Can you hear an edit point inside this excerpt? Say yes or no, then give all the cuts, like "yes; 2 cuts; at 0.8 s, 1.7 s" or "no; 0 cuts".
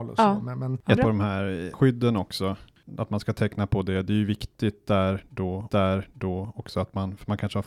yes; 3 cuts; at 1.0 s, 1.7 s, 5.7 s